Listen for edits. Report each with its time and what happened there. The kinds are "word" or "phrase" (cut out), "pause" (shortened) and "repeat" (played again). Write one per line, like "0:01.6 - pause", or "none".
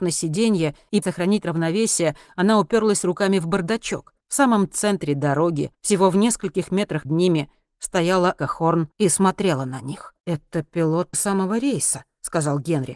0:01.0 - word
0:04.2 - pause
0:05.7 - pause
0:07.1 - word
0:08.4 - word
0:08.9 - pause
0:10.2 - pause
0:11.1 - word